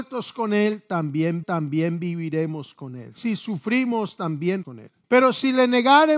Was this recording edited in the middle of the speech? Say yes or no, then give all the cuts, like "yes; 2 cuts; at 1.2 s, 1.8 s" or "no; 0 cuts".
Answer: yes; 3 cuts; at 1.4 s, 4.6 s, 5.0 s